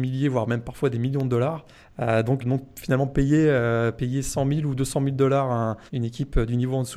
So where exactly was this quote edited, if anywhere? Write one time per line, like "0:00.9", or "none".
0:01.7
0:02.4
0:05.9